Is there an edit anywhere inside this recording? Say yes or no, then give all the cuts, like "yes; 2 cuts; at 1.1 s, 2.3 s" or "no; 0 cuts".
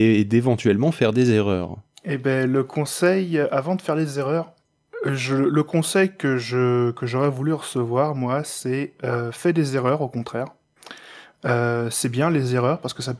no; 0 cuts